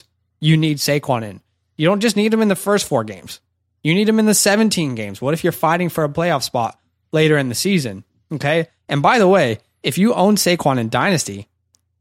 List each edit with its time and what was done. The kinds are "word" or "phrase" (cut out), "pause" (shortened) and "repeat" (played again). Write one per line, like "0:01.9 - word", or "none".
none